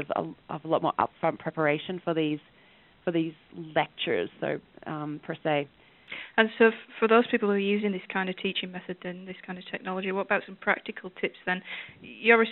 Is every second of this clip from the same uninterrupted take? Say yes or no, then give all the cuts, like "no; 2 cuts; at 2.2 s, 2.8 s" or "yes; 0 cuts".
yes; 0 cuts